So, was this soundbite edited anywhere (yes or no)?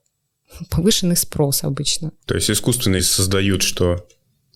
yes